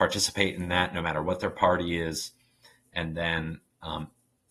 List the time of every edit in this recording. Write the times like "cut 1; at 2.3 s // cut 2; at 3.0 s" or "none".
none